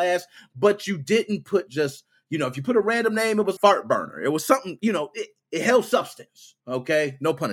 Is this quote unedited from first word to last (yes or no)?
no